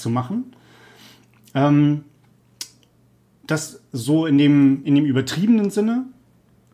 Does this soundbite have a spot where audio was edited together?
no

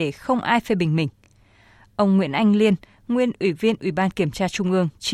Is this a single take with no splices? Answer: yes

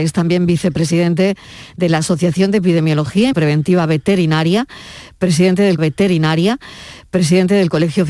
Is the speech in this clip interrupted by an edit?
yes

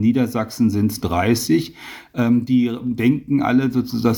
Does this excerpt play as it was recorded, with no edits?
no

